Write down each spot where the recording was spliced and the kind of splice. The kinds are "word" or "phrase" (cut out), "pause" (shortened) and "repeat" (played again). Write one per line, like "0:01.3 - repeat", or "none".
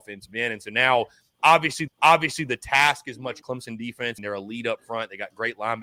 0:01.9 - repeat
0:03.4 - phrase
0:04.2 - word